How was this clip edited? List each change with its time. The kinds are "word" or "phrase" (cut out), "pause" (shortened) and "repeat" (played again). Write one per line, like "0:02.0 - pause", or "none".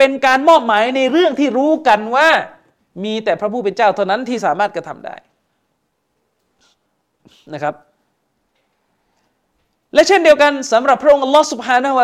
0:02.8 - pause